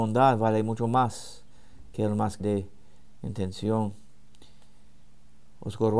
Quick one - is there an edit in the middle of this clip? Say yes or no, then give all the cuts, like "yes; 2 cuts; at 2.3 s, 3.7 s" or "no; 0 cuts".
yes; 1 cut; at 2.4 s